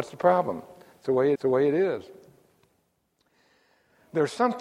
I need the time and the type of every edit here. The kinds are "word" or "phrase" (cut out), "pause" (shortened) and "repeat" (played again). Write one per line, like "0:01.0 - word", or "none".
0:01.4 - repeat